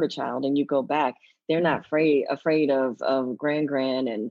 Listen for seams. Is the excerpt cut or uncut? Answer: uncut